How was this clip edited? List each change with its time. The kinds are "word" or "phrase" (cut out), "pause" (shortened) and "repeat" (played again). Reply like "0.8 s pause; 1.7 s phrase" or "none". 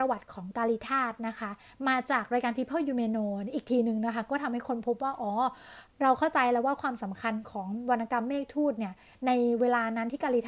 none